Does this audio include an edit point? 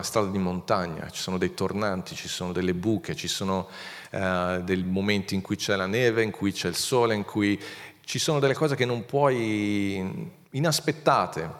no; 0 cuts

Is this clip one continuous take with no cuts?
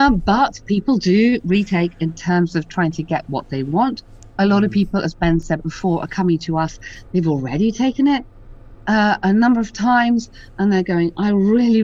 yes; 0 cuts

